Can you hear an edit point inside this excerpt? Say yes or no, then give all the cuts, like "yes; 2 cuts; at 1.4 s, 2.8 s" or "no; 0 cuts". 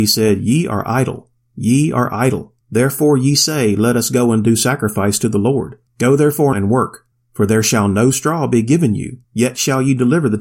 yes; 4 cuts; at 2.6 s, 5.9 s, 6.5 s, 9.2 s